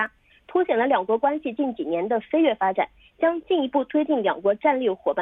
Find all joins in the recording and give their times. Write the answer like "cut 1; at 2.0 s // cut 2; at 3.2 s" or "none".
none

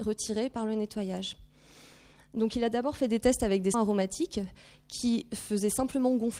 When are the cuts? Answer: cut 1; at 3.7 s

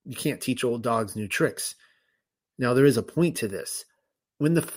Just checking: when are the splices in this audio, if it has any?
none

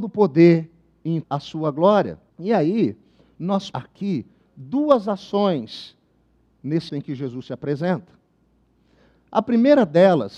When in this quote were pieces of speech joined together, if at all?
cut 1; at 1.2 s // cut 2; at 2.3 s // cut 3; at 3.7 s // cut 4; at 6.9 s

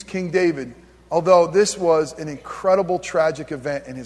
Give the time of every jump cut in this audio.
none

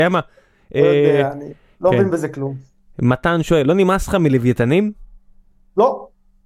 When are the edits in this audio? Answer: none

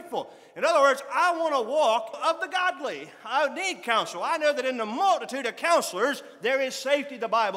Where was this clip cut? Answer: cut 1; at 2.1 s

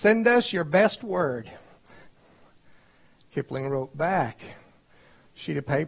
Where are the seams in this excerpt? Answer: none

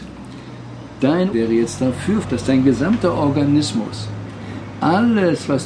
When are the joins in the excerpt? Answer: cut 1; at 1.3 s // cut 2; at 2.2 s

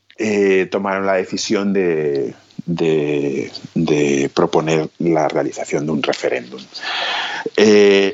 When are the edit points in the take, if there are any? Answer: none

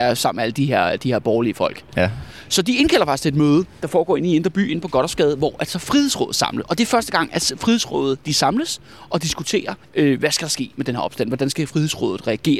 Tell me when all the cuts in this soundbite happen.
cut 1; at 9.8 s

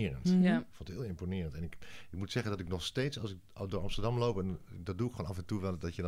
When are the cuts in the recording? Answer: none

